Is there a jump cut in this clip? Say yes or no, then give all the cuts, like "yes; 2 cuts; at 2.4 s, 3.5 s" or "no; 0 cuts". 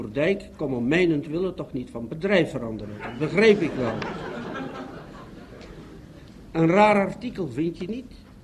no; 0 cuts